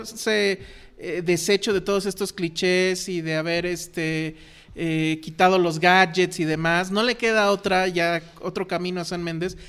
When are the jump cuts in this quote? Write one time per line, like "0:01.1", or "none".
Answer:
none